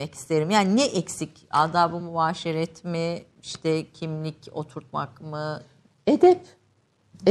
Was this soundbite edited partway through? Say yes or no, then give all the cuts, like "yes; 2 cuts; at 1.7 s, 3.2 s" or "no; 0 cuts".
no; 0 cuts